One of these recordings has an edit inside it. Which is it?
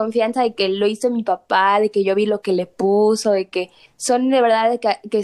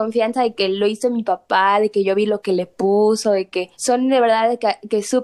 second; 1 cut; at 3.7 s

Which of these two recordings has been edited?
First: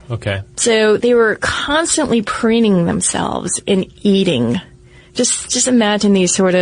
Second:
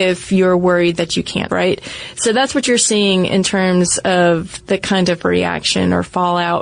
second; 1 cut; at 1.5 s

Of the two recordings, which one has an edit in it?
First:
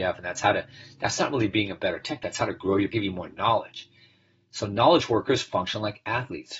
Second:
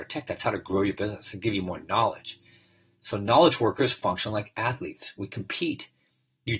first; 1 cut; at 2.9 s

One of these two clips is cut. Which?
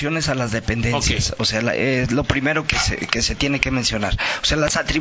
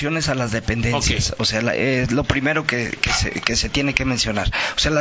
first; 1 cut; at 2.7 s

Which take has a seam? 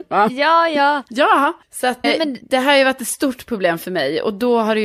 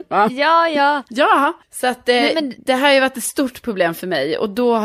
first; 1 cut; at 2.0 s

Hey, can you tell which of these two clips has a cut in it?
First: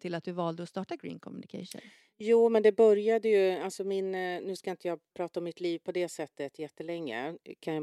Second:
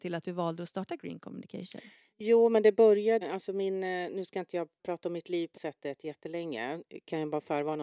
second; 2 cuts; at 3.2 s, 5.5 s

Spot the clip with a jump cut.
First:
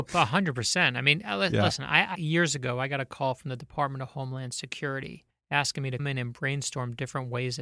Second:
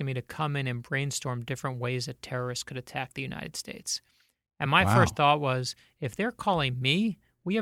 first; 3 cuts; at 2.1 s, 5.3 s, 6.0 s

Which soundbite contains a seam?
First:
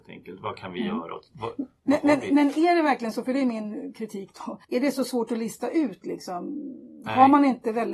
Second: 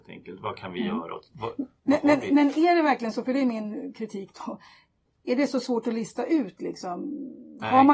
first; 1 cut; at 4.6 s

